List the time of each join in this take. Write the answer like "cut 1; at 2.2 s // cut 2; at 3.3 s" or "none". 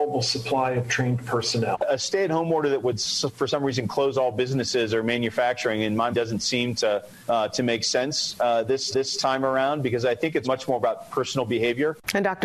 cut 1; at 6.1 s // cut 2; at 7.2 s // cut 3; at 8.9 s // cut 4; at 10.4 s